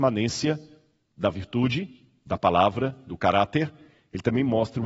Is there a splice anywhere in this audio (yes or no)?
no